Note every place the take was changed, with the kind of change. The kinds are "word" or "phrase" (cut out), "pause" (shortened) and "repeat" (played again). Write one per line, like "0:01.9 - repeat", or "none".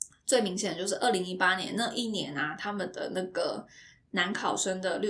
none

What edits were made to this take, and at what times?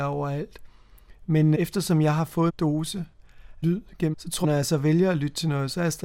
0:01.5 - word
0:02.5 - word
0:03.6 - word
0:04.1 - word
0:04.4 - word

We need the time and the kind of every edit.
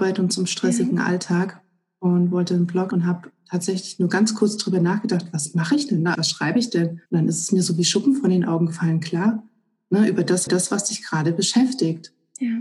0:02.9 - word
0:06.1 - word
0:07.1 - pause
0:10.5 - repeat

